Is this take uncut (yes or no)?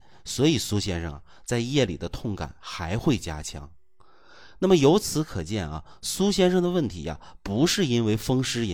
yes